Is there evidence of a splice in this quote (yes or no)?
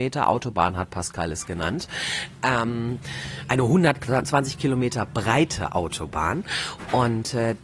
no